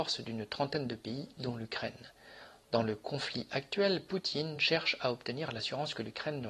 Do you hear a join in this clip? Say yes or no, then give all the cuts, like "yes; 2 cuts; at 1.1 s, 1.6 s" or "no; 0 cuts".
no; 0 cuts